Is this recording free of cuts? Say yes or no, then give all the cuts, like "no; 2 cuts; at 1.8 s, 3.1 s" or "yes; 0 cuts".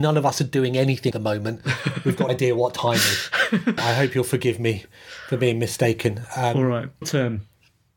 no; 4 cuts; at 1.1 s, 2.3 s, 3.8 s, 7.0 s